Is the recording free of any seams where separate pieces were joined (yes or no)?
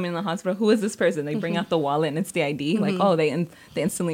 yes